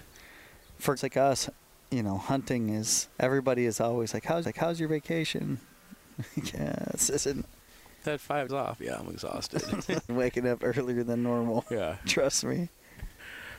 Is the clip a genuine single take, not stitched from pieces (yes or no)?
no